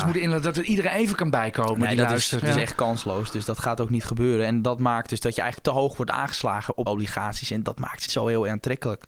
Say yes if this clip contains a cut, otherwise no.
yes